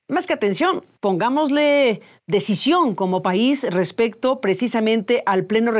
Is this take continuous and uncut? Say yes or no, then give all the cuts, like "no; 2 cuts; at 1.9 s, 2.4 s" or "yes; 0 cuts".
yes; 0 cuts